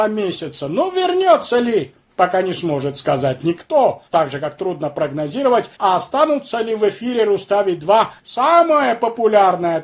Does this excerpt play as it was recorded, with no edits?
no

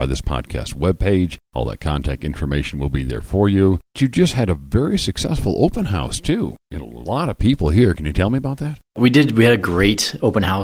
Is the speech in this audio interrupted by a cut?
no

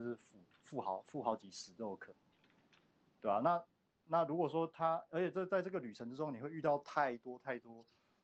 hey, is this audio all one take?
yes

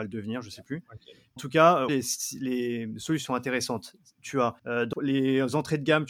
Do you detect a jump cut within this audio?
yes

